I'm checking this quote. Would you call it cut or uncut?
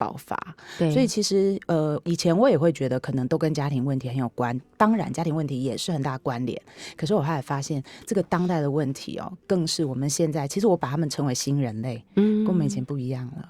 uncut